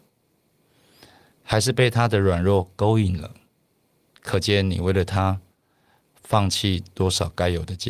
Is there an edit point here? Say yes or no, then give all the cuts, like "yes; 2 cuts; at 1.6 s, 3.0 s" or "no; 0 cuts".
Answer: no; 0 cuts